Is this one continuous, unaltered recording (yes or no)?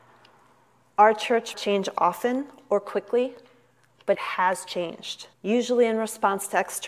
no